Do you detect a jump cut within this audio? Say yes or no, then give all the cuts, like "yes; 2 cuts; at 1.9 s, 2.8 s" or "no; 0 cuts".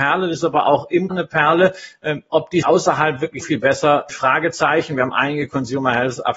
yes; 4 cuts; at 1.1 s, 2.6 s, 3.4 s, 4.1 s